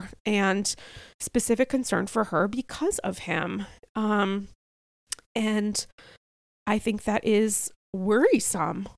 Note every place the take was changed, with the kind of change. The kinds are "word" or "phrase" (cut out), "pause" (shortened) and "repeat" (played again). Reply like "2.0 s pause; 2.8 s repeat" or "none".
none